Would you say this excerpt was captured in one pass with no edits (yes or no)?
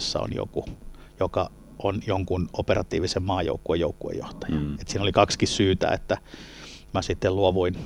yes